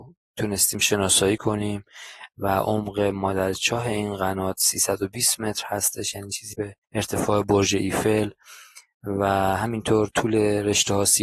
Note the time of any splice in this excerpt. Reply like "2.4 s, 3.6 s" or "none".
6.5 s, 6.8 s

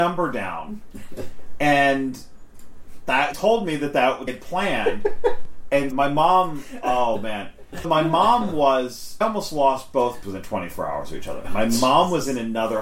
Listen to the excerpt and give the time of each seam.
3.3 s, 4.3 s, 5.9 s, 7.8 s, 9.2 s, 10.2 s

